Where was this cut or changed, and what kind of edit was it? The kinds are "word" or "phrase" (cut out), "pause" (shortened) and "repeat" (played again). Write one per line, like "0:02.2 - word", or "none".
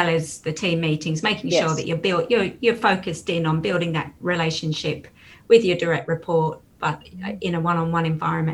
none